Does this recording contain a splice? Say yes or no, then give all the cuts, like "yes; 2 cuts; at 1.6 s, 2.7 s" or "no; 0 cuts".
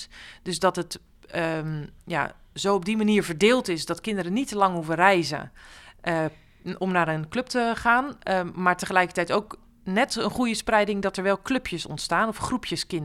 no; 0 cuts